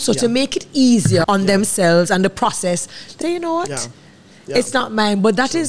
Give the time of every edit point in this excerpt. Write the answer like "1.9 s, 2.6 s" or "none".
1.2 s, 3.2 s